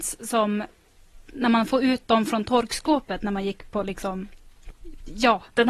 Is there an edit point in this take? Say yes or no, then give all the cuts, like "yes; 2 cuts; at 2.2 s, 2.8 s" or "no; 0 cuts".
no; 0 cuts